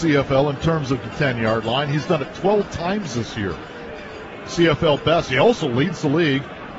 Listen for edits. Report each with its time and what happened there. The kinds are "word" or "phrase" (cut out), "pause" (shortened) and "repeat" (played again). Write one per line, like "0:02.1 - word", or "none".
0:01.0 - phrase

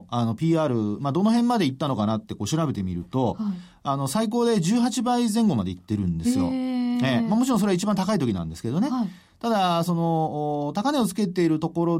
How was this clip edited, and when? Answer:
none

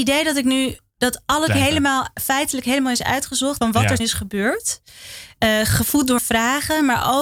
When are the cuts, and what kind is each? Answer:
0:01.5 - word
0:03.6 - phrase
0:04.0 - word
0:06.2 - word

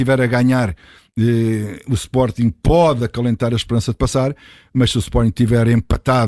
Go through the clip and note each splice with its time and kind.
none

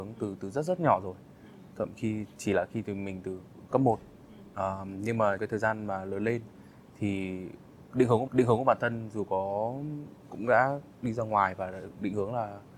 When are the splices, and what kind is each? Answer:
0:05.4 - word
0:08.3 - repeat
0:10.3 - word

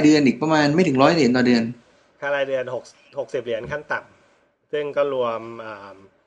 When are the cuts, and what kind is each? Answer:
none

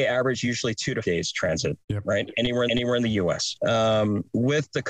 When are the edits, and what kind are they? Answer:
0:01.0 - word
0:01.8 - pause
0:02.7 - repeat

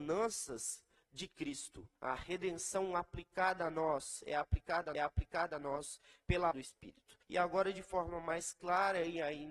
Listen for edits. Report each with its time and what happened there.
0:01.0 - pause
0:02.0 - pause
0:04.9 - repeat
0:06.5 - word
0:07.2 - pause

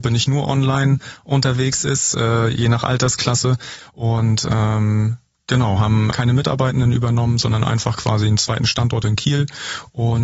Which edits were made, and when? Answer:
0:06.1 - word

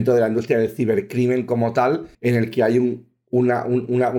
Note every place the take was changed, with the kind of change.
0:02.1 - pause

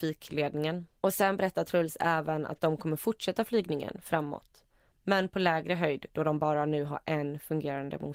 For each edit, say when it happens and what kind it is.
0:01.0 - pause

